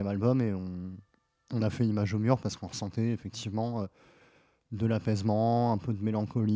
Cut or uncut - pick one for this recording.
uncut